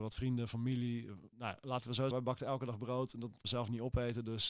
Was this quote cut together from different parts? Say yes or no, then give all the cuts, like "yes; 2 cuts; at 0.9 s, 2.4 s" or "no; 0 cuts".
yes; 3 cuts; at 1.3 s, 2.1 s, 3.4 s